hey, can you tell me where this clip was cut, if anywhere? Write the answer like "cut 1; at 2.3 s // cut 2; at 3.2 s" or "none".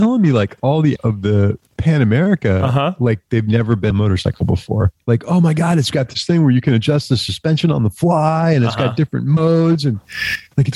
cut 1; at 1.0 s // cut 2; at 3.9 s